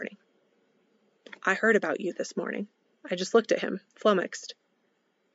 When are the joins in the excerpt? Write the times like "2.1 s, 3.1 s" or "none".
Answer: 2.9 s, 3.9 s